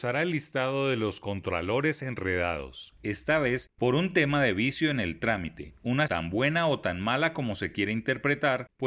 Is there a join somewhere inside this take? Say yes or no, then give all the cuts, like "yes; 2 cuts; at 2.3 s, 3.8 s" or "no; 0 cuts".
yes; 1 cut; at 6.1 s